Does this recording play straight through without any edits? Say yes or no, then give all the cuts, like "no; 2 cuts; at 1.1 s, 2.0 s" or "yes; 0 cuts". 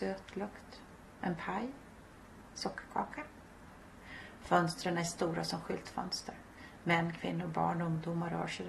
yes; 0 cuts